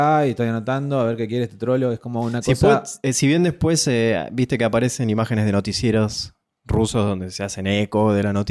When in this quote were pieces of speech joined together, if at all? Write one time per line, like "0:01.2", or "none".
none